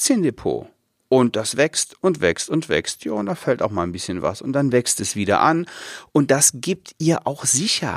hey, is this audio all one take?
yes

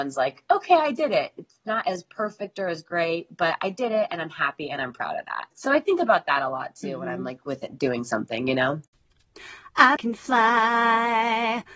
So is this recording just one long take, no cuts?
no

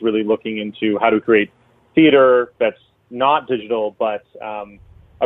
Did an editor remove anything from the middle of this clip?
no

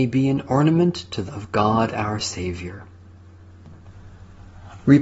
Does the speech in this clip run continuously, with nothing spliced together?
no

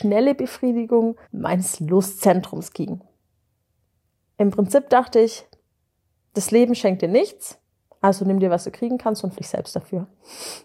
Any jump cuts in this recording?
yes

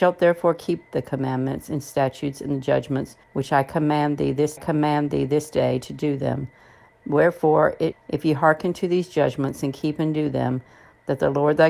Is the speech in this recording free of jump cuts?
no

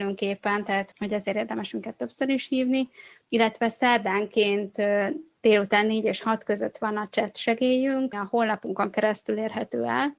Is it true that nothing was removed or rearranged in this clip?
no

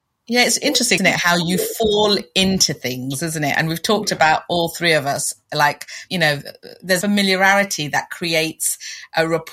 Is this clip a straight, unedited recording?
no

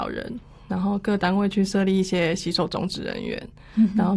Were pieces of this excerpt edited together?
no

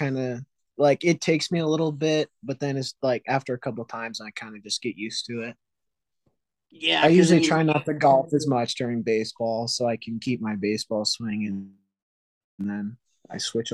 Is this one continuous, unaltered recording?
yes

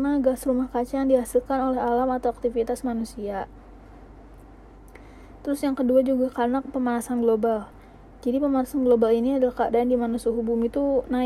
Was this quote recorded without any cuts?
yes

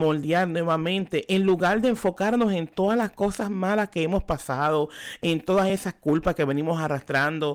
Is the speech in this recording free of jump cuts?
yes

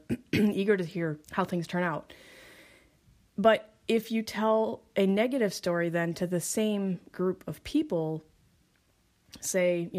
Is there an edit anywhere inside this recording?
yes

